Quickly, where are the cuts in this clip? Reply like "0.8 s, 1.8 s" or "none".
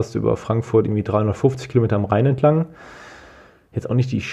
none